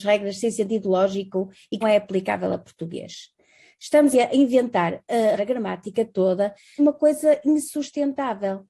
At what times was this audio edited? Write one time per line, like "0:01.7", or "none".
0:01.8
0:04.1
0:05.4
0:06.8